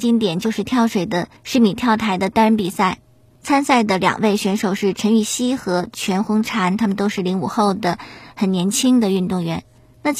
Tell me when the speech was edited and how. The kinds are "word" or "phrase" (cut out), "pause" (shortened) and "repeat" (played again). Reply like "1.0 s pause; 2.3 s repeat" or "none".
1.4 s pause